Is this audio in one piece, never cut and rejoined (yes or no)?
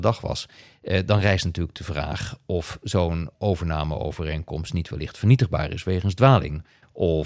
yes